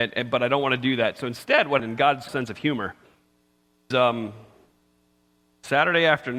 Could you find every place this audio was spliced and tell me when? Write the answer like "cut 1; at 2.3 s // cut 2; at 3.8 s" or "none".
cut 1; at 1.8 s // cut 2; at 2.3 s // cut 3; at 3.9 s